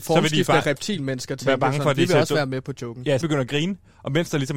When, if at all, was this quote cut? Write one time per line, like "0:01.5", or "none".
0:03.2